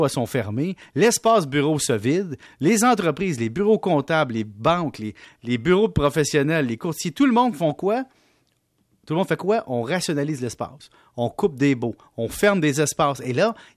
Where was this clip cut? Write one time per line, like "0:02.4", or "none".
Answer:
none